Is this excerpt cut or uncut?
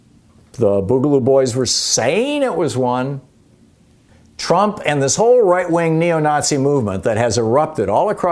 uncut